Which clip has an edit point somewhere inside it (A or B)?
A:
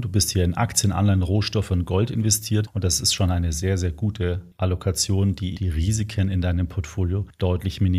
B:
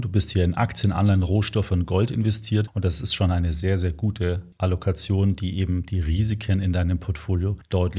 A